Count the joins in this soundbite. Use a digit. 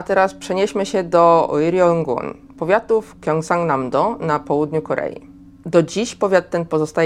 0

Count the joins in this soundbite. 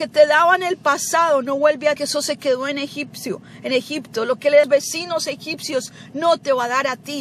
2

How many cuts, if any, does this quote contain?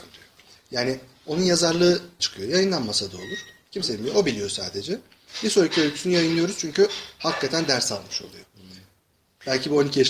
1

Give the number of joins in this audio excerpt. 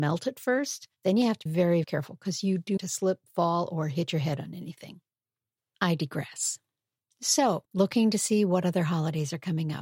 4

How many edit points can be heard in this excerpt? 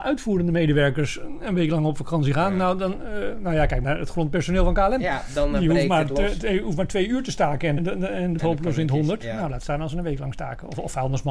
3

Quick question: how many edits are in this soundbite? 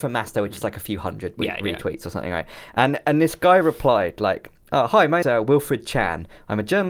1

